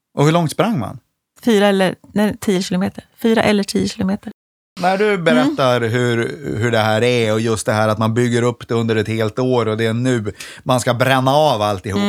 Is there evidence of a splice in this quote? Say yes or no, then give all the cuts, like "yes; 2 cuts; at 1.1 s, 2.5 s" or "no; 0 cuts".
yes; 1 cut; at 1.3 s